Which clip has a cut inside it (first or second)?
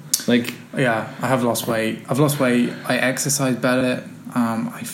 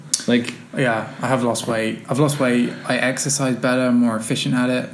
first